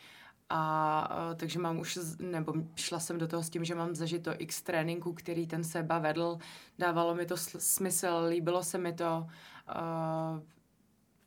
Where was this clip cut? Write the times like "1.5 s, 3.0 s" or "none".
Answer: 9.7 s